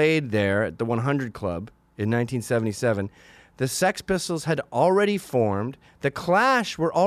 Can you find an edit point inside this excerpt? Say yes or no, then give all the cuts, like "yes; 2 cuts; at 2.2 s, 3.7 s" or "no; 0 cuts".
no; 0 cuts